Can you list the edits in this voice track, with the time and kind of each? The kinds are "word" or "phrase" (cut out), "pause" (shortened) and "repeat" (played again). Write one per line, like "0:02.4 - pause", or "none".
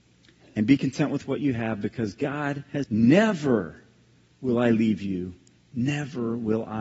0:02.8 - word